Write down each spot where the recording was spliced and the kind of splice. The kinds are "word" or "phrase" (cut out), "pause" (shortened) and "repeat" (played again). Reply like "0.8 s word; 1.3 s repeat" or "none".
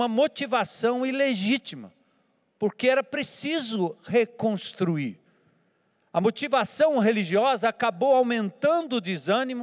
none